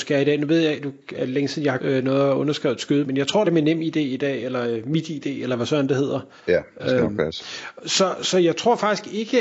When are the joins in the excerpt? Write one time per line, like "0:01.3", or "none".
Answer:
0:01.8
0:03.0
0:03.4
0:06.4